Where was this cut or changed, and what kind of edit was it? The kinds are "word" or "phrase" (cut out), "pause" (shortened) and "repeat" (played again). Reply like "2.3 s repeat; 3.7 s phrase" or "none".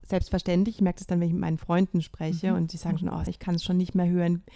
3.3 s word